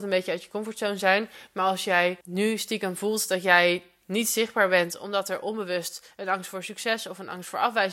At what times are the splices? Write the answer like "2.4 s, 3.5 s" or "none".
2.2 s

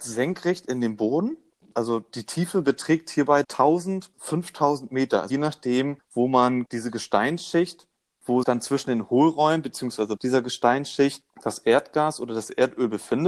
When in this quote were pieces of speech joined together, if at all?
3.4 s, 4.1 s, 5.3 s, 6.7 s, 8.4 s, 10.2 s

